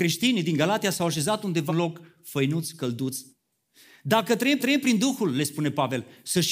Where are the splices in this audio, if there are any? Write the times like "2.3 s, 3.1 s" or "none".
1.7 s, 4.6 s

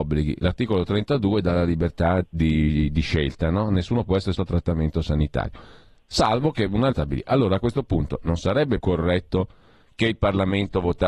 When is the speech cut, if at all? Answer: 2.2 s, 4.3 s, 6.9 s, 8.8 s

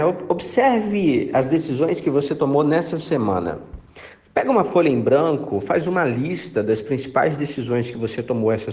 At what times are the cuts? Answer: none

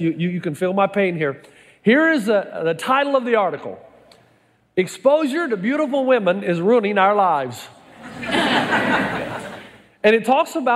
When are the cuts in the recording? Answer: none

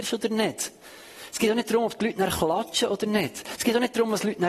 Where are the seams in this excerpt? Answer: none

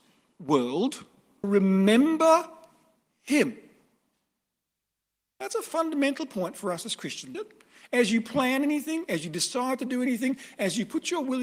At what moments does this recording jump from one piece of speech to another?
1.4 s, 7.3 s

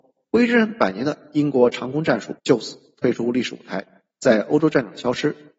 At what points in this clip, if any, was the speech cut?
2.4 s, 4.1 s

